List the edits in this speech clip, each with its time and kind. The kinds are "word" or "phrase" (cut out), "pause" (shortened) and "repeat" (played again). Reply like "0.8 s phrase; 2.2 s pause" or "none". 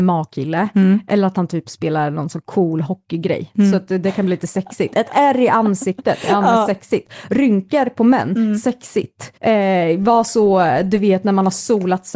9.4 s pause